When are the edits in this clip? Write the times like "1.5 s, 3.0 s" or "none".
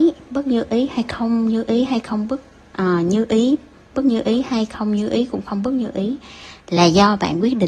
none